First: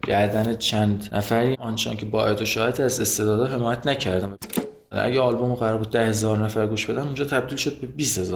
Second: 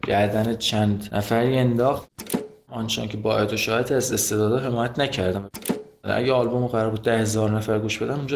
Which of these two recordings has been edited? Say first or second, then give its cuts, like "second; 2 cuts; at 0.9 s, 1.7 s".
first; 1 cut; at 1.5 s